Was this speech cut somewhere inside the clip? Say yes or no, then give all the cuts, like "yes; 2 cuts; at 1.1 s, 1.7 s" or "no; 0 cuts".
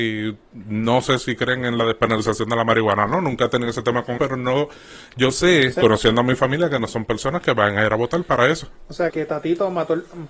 yes; 2 cuts; at 4.2 s, 9.1 s